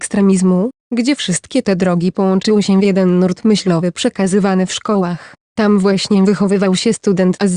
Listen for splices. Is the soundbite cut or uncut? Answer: uncut